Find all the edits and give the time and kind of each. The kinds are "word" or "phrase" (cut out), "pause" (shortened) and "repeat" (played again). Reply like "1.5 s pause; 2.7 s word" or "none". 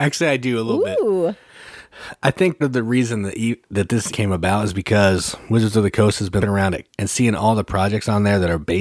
2.6 s word; 4.1 s word; 6.4 s word; 6.9 s word